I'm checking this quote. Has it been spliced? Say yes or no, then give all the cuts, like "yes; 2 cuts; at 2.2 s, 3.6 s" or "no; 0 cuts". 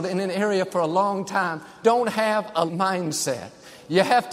yes; 2 cuts; at 1.8 s, 2.7 s